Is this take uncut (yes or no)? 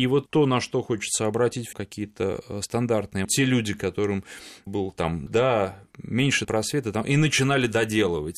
no